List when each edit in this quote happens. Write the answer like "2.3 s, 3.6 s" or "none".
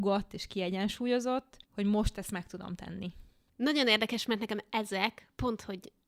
1.6 s

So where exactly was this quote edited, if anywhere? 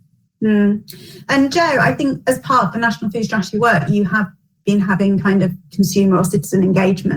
none

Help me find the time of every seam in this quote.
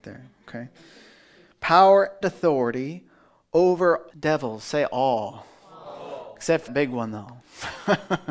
2.2 s, 4.1 s, 6.7 s

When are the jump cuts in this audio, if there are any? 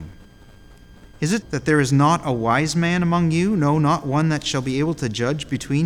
1.4 s

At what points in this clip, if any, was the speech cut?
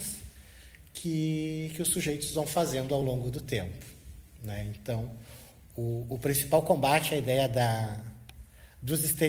none

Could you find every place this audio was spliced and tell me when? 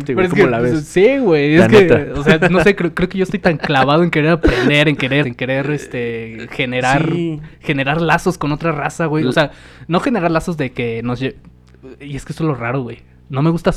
5.2 s

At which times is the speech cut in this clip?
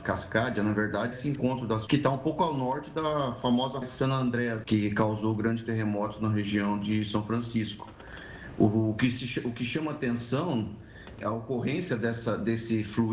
1.1 s, 1.9 s, 3.8 s, 4.6 s, 11.2 s

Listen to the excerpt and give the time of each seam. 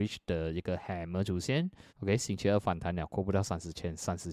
1.9 s

